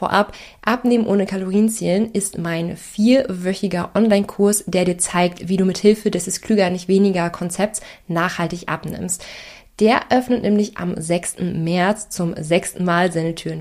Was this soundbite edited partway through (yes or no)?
no